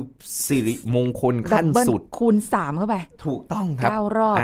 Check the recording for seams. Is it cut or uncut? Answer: cut